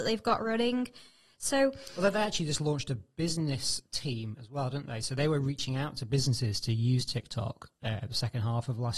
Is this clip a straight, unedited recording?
yes; 0 cuts

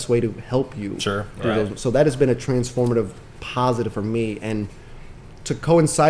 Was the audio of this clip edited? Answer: yes; 1 cut; at 3.9 s

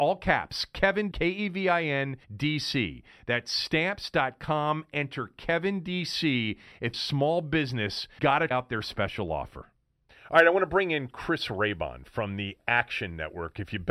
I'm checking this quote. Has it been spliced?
yes; 5 cuts; at 1.1 s, 2.2 s, 6.9 s, 8.2 s, 8.5 s

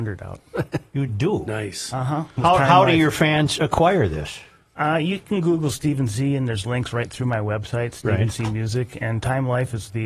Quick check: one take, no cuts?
yes; 0 cuts

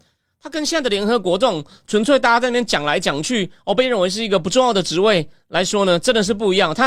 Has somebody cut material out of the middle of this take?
no; 0 cuts

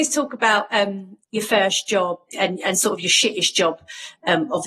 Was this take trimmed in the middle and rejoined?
no; 0 cuts

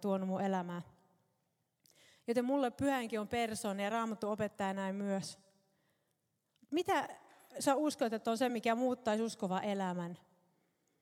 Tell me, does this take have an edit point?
no; 0 cuts

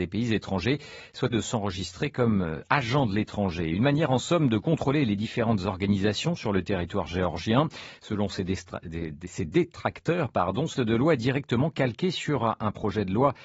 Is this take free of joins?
no; 2 cuts; at 1.3 s, 10.7 s

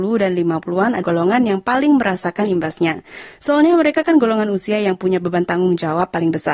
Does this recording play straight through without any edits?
no; 1 cut; at 1.0 s

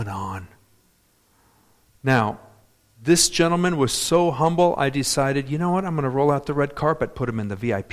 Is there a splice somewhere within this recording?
no; 0 cuts

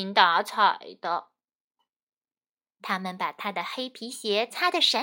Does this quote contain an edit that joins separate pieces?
no; 0 cuts

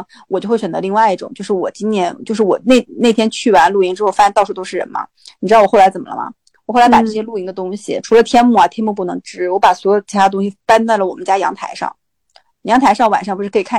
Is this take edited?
no; 0 cuts

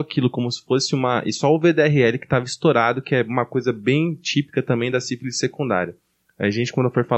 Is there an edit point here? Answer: no; 0 cuts

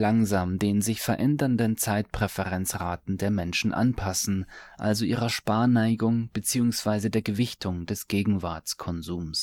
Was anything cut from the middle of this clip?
no; 0 cuts

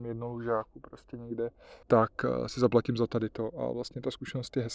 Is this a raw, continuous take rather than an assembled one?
no; 1 cut; at 1.8 s

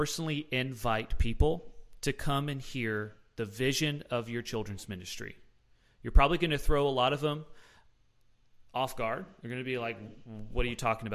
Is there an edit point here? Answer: no; 0 cuts

